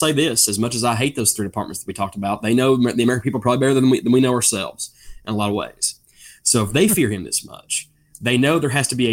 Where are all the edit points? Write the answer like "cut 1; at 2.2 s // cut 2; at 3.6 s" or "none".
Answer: none